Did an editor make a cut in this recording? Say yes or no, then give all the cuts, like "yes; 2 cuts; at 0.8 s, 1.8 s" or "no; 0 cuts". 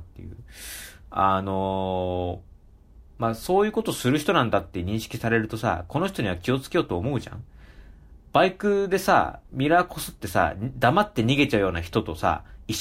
no; 0 cuts